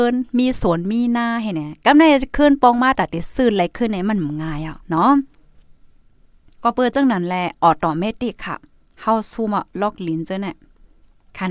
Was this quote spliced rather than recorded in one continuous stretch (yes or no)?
yes